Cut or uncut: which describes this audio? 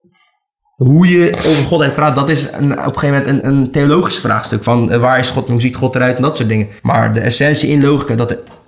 cut